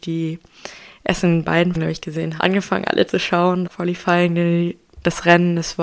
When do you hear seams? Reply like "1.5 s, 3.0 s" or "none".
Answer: 1.7 s, 2.4 s, 3.1 s, 3.6 s